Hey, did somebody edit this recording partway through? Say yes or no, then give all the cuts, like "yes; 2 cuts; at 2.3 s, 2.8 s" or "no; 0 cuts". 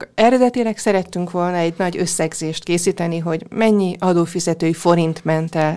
no; 0 cuts